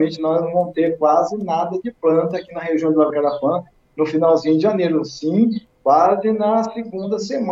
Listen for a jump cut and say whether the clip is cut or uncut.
cut